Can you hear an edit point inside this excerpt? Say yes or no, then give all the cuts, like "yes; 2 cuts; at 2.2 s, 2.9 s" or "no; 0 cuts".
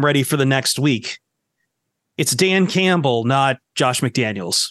yes; 1 cut; at 3.6 s